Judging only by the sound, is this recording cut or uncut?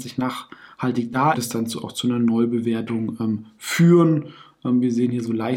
cut